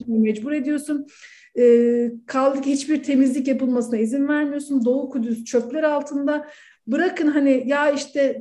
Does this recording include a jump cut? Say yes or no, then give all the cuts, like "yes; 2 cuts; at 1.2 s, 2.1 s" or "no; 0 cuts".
no; 0 cuts